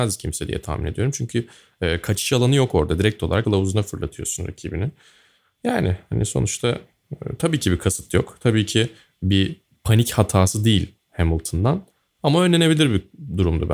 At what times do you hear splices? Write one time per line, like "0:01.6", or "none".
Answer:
0:03.4